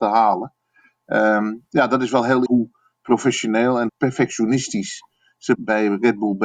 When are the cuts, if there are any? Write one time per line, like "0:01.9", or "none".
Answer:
0:02.5
0:03.9